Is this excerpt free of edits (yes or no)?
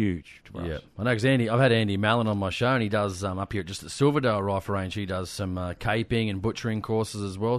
yes